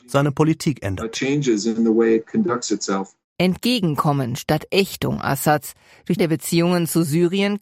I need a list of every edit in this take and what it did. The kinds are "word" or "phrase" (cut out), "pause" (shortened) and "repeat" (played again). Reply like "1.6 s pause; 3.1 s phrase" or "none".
6.2 s phrase